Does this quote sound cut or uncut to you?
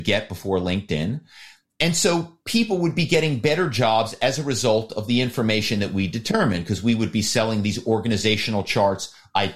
uncut